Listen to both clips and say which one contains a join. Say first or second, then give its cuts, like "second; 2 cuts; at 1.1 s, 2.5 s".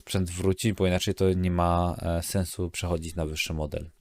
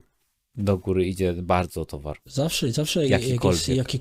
first; 1 cut; at 2.7 s